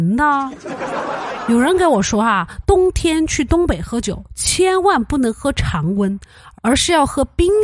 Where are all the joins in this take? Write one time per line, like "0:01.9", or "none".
none